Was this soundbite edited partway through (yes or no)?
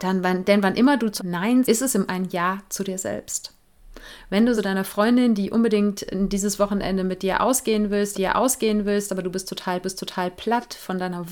yes